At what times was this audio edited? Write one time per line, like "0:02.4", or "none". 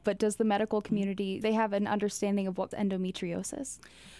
0:01.4
0:02.7